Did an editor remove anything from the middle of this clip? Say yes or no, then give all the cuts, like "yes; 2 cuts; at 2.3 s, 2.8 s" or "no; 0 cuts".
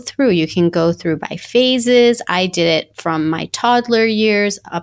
no; 0 cuts